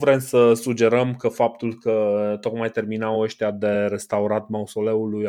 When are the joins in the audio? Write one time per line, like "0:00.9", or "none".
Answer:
none